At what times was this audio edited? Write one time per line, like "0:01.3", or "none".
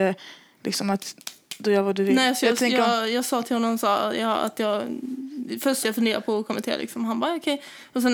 0:05.8